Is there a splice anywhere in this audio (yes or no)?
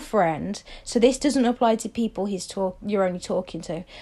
no